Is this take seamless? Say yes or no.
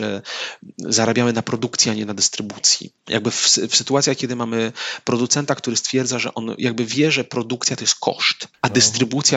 no